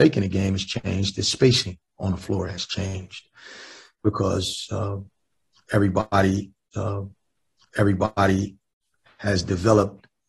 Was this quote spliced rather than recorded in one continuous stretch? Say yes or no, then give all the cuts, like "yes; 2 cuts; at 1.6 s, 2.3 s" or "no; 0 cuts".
yes; 1 cut; at 6.7 s